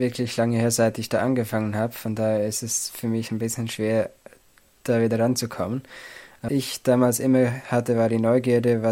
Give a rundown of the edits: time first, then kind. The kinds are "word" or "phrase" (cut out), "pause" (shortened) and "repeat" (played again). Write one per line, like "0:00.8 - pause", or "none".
0:06.5 - word